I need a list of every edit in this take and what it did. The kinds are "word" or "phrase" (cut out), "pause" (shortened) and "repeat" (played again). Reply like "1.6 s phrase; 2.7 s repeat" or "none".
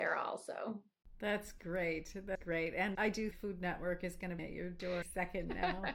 2.3 s word; 2.9 s word; 3.3 s word; 4.4 s word; 5.0 s word